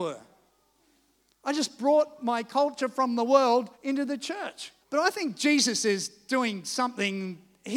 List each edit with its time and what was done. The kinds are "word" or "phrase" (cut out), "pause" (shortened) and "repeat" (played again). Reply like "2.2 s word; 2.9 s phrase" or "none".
3.7 s pause; 4.8 s pause